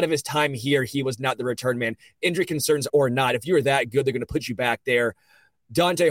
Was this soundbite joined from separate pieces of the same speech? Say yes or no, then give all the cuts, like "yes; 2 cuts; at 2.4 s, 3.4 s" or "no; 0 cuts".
yes; 1 cut; at 2.9 s